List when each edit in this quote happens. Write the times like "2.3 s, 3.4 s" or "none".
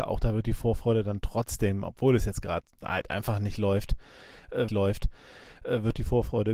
2.7 s, 4.7 s